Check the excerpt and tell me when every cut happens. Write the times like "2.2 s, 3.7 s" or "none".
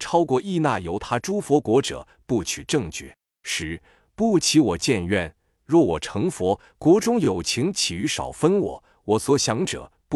none

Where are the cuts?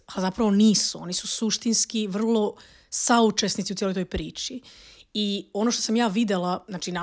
none

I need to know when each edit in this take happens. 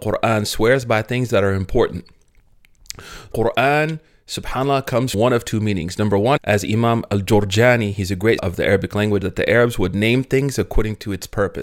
3.3 s, 5.1 s, 6.4 s, 8.4 s, 9.2 s

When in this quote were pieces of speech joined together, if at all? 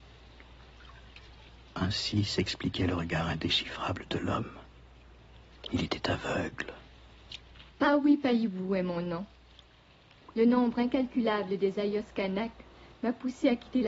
none

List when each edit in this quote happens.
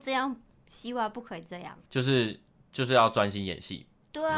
1.9 s

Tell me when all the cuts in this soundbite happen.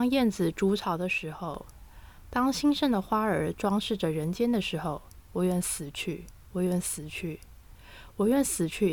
6.4 s

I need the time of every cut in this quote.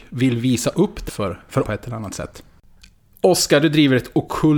1.1 s, 1.6 s

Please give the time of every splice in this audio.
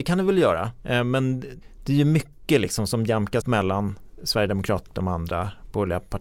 3.4 s, 4.9 s

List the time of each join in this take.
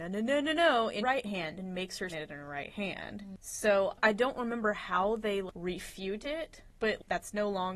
1.0 s, 2.1 s

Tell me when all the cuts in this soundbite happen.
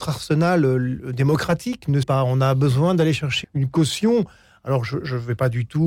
2.0 s, 3.4 s

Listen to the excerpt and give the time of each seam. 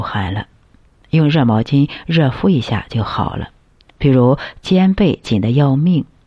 3.8 s

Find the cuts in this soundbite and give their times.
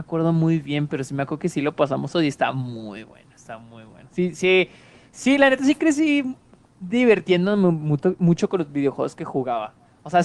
none

